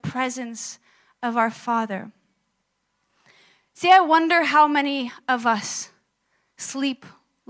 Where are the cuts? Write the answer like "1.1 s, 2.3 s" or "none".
none

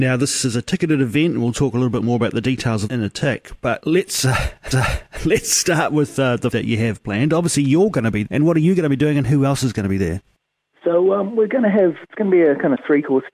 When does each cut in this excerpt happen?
2.9 s, 4.7 s, 6.5 s, 8.3 s, 10.3 s

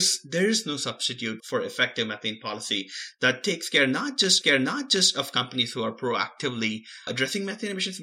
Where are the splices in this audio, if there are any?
1.4 s, 4.4 s, 7.1 s

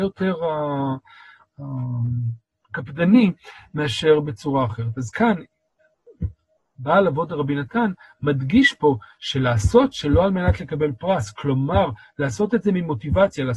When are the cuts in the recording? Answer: none

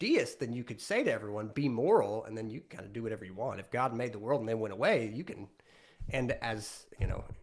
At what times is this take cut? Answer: none

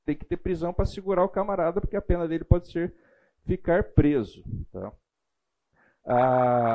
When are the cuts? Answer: none

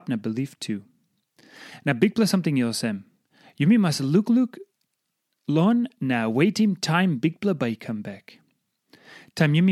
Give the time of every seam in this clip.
none

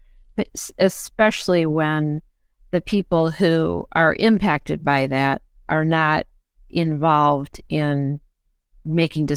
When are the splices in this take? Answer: none

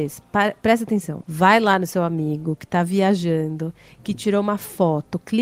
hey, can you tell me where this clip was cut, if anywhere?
none

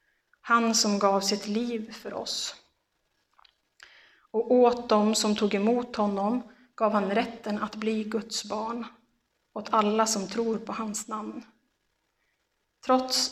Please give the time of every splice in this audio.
none

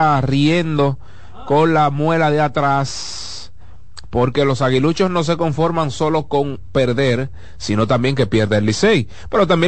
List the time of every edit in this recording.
none

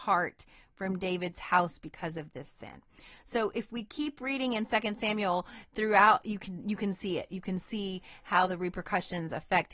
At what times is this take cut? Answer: none

